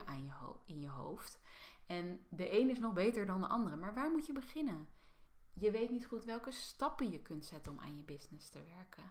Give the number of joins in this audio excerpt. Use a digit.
0